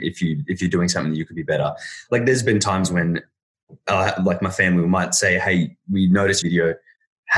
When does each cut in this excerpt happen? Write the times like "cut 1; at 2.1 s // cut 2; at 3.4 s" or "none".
cut 1; at 6.4 s